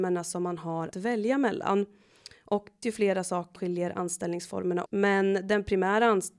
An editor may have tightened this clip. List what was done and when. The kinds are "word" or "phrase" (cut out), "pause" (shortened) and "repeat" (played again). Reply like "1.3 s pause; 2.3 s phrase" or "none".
0.9 s word; 2.8 s word; 3.6 s word; 4.9 s word